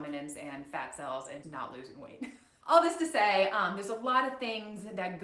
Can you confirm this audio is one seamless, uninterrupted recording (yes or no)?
no